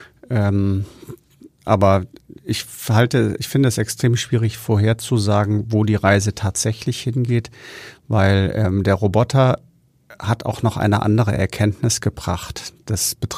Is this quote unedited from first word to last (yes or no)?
yes